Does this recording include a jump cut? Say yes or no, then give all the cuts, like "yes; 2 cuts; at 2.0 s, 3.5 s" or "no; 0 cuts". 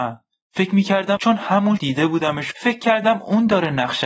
yes; 3 cuts; at 1.2 s, 1.8 s, 2.5 s